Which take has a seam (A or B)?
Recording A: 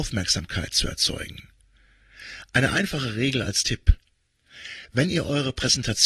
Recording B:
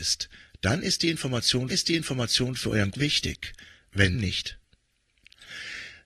B